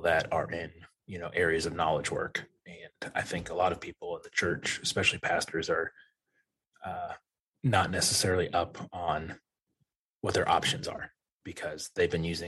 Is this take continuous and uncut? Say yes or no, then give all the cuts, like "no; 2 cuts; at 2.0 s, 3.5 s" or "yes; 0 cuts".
yes; 0 cuts